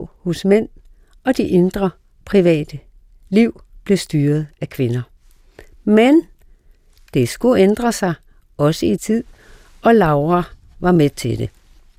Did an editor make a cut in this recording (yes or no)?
yes